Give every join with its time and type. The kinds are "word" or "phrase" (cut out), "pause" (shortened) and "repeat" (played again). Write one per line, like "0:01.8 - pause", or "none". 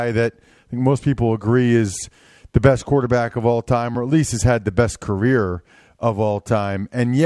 none